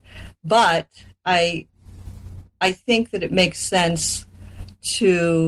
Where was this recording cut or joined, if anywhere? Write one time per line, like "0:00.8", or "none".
none